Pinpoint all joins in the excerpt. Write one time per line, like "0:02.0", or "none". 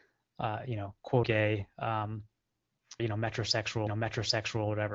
0:01.2
0:03.0
0:03.9